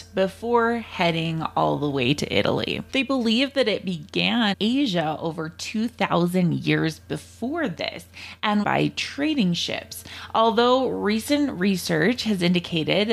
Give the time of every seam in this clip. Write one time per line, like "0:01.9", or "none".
0:02.9
0:04.5
0:08.6